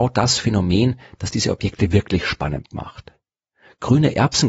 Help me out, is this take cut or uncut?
uncut